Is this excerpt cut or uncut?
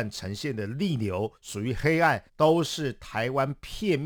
cut